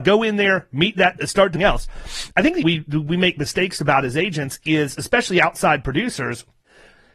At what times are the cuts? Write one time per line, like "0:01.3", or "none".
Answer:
0:01.2
0:01.5
0:02.6